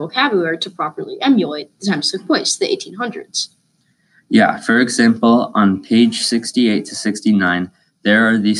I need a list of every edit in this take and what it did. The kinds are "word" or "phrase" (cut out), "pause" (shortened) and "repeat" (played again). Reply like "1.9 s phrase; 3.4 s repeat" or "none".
none